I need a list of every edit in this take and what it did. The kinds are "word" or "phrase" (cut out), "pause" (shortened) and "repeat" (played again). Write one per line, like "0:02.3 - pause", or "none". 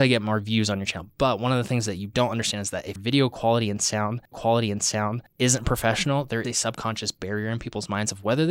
0:03.0 - word
0:04.3 - repeat
0:06.4 - word